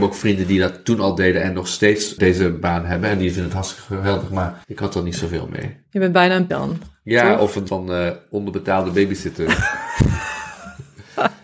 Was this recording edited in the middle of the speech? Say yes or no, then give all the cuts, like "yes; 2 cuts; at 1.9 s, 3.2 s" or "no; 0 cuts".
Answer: yes; 4 cuts; at 2.2 s, 4.6 s, 6.5 s, 7.7 s